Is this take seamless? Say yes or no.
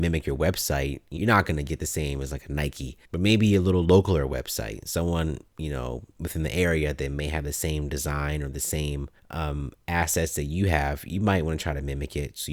no